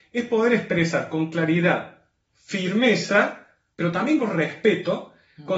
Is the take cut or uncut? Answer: uncut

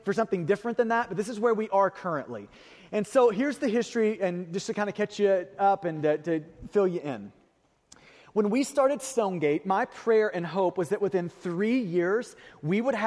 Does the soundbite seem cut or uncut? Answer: uncut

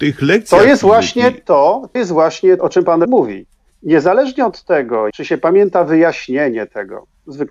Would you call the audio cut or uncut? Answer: cut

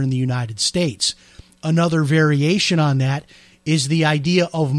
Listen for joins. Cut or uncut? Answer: uncut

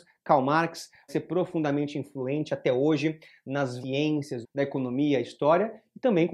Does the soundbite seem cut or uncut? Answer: cut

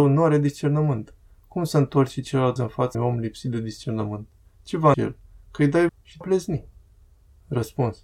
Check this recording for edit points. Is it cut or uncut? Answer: cut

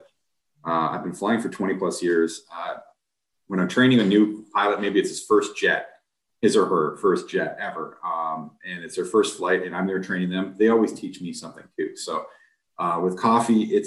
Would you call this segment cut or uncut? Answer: uncut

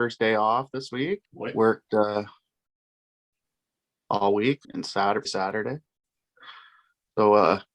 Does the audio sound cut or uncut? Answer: cut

